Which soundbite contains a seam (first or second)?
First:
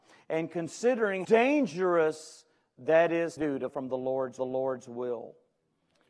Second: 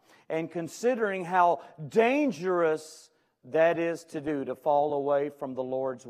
first